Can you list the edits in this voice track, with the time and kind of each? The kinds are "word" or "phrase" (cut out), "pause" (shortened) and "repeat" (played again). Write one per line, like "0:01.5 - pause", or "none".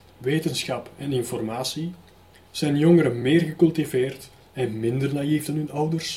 none